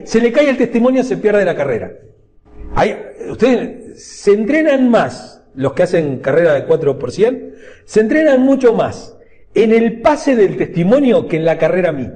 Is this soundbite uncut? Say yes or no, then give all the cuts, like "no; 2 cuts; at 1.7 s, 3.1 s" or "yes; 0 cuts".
yes; 0 cuts